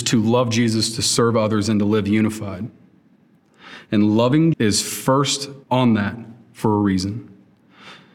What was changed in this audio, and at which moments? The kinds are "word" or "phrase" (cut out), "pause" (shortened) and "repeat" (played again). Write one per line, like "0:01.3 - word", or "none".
0:04.5 - word
0:05.6 - pause